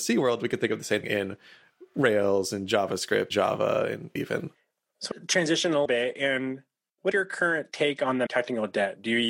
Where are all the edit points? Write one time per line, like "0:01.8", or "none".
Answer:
0:01.0
0:03.3
0:04.2
0:05.1
0:05.9
0:07.1
0:08.3